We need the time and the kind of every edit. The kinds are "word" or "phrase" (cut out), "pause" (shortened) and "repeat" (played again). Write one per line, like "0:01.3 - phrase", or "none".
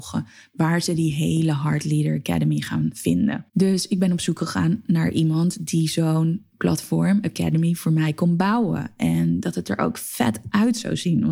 0:03.5 - pause